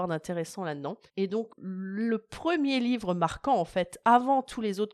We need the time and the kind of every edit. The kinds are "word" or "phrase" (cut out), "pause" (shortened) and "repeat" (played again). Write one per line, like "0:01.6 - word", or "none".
0:01.1 - pause
0:01.5 - word